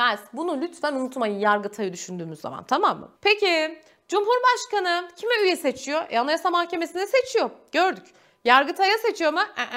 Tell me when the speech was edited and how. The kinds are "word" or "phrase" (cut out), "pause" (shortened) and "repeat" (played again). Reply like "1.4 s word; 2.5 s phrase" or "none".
3.2 s pause